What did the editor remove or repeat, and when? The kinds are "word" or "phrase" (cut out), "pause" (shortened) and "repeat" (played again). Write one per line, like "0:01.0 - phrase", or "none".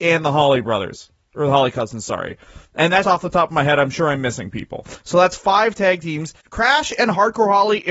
0:03.0 - word
0:06.4 - pause